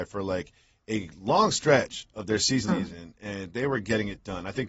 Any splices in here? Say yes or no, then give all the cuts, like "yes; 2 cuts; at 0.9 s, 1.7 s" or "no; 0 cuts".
yes; 1 cut; at 2.7 s